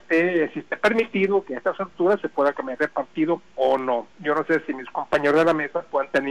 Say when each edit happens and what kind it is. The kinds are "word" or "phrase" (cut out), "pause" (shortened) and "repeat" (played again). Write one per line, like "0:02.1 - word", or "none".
0:03.5 - pause

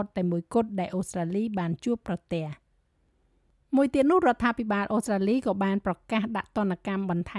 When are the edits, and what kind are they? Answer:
none

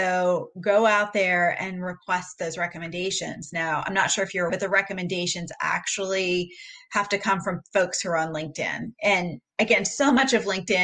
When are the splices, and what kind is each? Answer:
0:04.5 - word

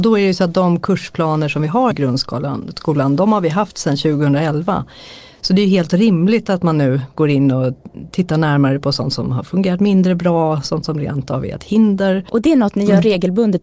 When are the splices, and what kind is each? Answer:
0:01.9 - word

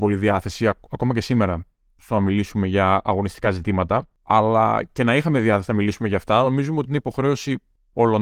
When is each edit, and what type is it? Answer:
none

